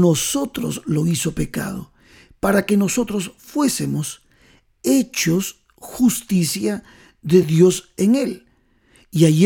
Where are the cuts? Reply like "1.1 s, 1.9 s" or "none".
none